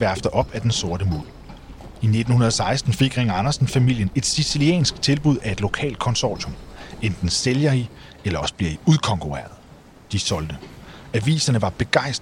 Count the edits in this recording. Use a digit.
0